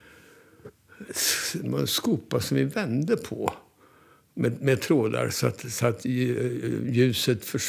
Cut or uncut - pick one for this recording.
uncut